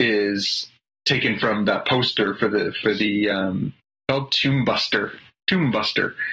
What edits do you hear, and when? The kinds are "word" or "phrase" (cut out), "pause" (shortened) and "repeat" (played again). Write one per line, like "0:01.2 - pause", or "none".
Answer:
none